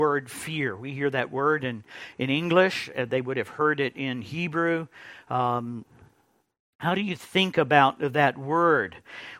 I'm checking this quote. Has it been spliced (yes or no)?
no